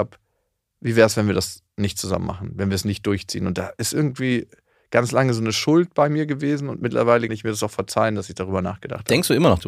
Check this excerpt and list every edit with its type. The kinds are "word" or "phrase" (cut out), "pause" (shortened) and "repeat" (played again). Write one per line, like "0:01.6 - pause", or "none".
0:07.3 - word